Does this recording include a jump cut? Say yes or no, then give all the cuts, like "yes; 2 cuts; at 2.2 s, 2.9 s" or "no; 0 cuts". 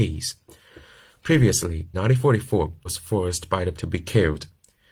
yes; 3 cuts; at 1.9 s, 2.8 s, 3.7 s